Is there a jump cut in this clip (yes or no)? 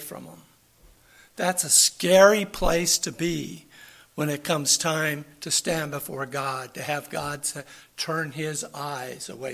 no